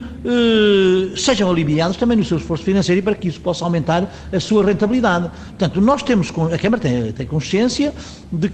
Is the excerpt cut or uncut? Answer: uncut